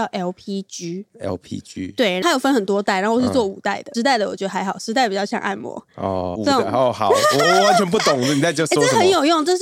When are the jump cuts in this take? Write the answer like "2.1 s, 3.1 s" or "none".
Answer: 1.1 s, 3.9 s, 6.4 s